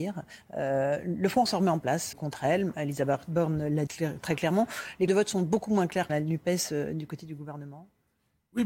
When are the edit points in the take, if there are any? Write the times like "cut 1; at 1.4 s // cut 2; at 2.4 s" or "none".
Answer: cut 1; at 1.5 s // cut 2; at 2.1 s // cut 3; at 3.9 s // cut 4; at 5.1 s // cut 5; at 6.1 s